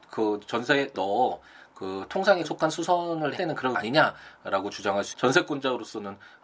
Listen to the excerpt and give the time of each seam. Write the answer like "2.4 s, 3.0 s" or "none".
0.9 s, 2.4 s, 3.4 s, 3.7 s, 5.1 s